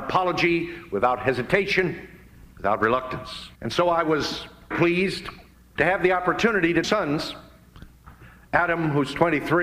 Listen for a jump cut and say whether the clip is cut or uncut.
cut